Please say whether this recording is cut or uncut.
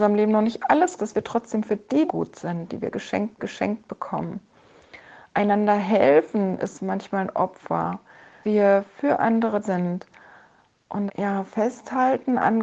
cut